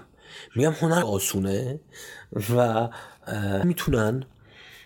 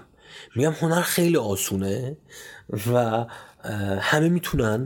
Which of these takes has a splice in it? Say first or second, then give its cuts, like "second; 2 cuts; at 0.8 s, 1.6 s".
first; 2 cuts; at 1.0 s, 3.6 s